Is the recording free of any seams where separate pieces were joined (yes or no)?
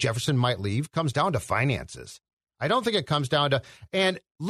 yes